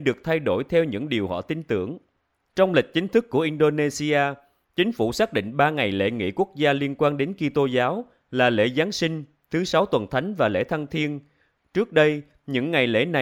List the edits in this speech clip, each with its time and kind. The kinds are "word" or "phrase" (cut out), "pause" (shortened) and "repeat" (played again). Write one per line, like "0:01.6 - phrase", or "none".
none